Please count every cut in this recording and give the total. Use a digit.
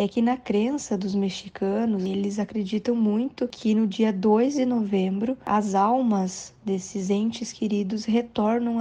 0